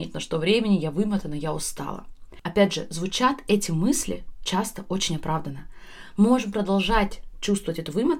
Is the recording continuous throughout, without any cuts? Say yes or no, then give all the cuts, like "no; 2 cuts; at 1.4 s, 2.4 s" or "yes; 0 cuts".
yes; 0 cuts